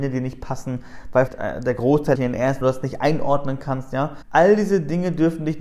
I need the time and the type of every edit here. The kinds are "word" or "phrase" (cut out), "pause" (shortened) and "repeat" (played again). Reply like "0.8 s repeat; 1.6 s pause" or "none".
1.3 s word; 2.2 s phrase; 2.6 s phrase